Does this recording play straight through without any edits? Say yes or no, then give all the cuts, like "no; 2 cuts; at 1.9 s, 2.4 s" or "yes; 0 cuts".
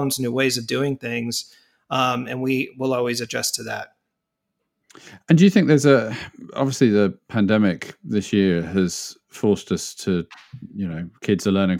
yes; 0 cuts